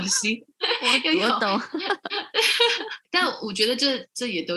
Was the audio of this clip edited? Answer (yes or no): no